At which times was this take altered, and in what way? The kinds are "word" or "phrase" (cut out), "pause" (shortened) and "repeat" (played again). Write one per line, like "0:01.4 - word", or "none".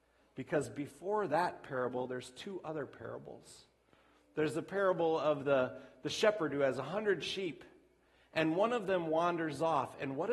none